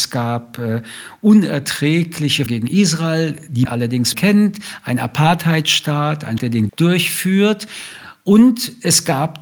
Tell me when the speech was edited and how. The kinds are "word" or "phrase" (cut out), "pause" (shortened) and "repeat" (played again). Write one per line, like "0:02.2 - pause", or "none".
0:02.5 - word
0:03.6 - word
0:04.1 - word
0:06.4 - word
0:06.7 - word